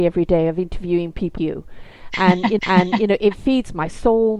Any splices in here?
yes; 2 cuts; at 1.4 s, 2.6 s

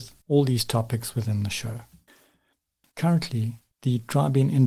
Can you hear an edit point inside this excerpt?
yes; 1 cut; at 3.7 s

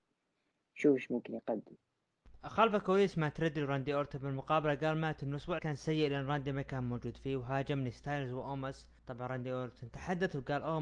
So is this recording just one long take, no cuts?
no; 2 cuts; at 5.6 s, 9.0 s

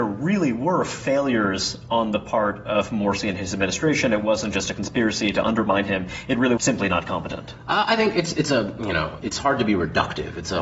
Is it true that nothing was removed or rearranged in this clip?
no; 2 cuts; at 6.6 s, 9.2 s

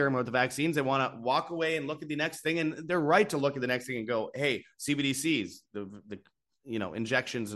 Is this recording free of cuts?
yes; 0 cuts

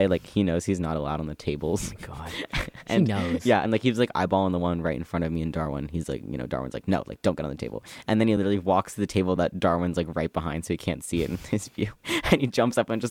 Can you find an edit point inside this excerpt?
no; 0 cuts

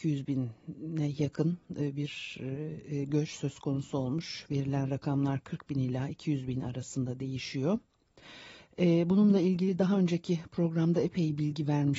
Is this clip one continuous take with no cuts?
yes; 0 cuts

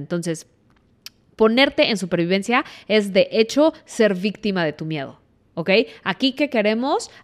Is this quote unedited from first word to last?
yes; 0 cuts

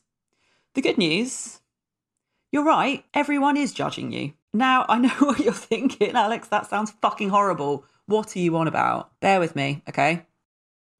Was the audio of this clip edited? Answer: yes; 3 cuts; at 3.1 s, 4.4 s, 9.2 s

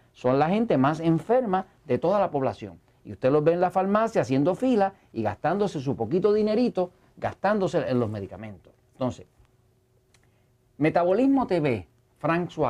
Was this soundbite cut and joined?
no; 0 cuts

